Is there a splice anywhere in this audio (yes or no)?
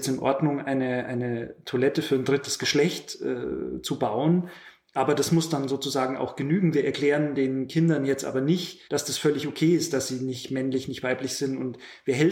yes